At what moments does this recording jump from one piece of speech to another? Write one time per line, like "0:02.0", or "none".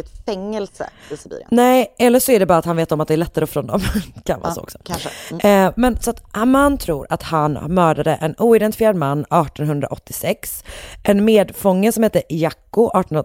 0:03.5